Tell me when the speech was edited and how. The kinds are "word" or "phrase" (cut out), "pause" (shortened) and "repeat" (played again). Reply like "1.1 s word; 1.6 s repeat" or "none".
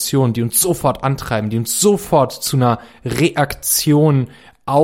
none